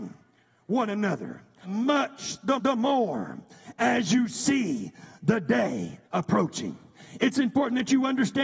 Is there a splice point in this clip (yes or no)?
yes